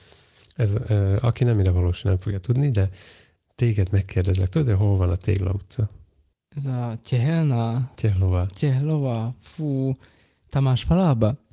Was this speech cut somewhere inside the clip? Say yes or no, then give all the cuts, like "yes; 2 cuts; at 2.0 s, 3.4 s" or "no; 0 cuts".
no; 0 cuts